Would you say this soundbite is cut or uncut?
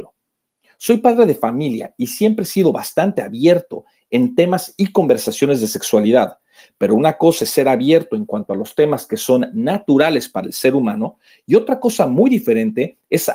uncut